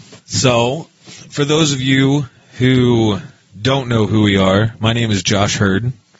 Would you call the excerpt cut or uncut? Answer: uncut